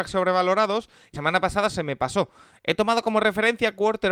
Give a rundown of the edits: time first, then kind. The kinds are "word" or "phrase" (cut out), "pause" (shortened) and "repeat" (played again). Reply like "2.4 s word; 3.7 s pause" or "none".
1.1 s word